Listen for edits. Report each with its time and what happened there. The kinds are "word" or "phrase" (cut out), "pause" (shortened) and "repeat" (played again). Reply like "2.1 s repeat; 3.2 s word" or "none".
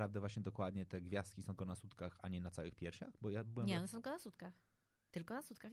1.6 s word